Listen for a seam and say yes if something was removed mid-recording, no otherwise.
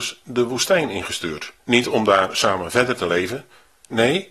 yes